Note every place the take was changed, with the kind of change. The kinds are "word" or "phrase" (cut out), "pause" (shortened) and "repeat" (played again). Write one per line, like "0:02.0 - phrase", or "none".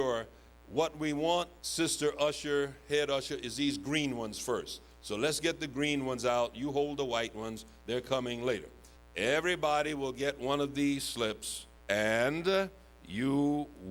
0:01.6 - pause
0:08.9 - pause
0:11.8 - pause